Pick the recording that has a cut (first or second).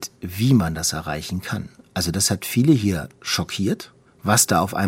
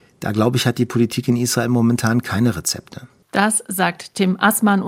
second